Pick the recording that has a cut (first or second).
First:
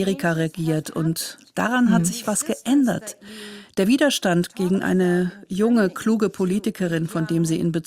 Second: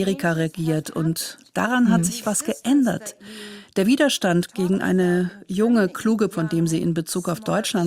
second